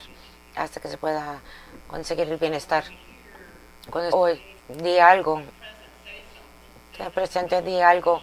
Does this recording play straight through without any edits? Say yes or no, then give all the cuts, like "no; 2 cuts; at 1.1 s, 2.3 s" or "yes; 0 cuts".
no; 2 cuts; at 4.1 s, 4.6 s